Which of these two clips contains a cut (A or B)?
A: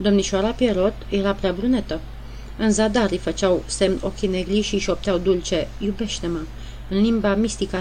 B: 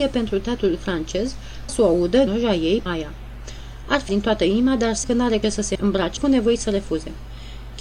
B